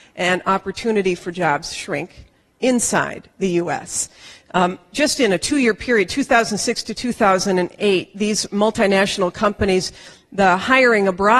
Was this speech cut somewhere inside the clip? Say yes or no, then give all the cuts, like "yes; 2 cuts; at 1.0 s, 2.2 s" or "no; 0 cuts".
no; 0 cuts